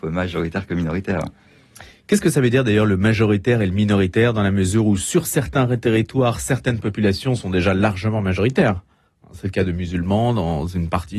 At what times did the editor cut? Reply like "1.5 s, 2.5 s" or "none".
none